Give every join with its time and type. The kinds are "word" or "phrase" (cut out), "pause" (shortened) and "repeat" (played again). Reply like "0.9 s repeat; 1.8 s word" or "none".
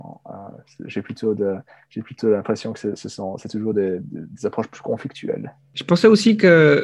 none